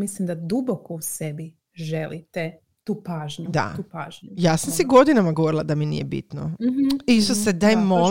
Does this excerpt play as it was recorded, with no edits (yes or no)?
yes